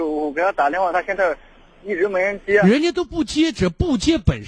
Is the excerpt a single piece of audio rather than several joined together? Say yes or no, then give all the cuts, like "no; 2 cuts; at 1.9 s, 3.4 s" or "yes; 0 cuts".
yes; 0 cuts